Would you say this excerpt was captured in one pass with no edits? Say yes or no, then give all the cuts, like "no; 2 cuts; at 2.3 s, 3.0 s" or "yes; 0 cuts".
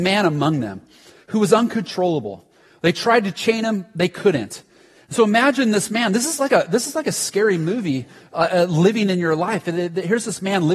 yes; 0 cuts